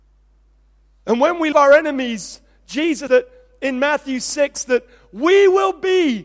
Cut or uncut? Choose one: cut